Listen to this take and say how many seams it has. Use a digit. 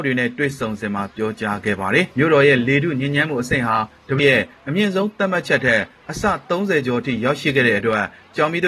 2